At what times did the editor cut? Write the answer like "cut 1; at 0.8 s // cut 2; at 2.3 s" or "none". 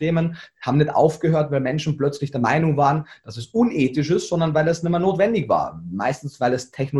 none